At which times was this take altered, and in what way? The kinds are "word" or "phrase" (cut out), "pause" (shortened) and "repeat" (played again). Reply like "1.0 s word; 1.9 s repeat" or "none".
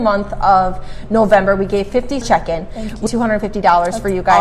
2.2 s phrase; 3.1 s phrase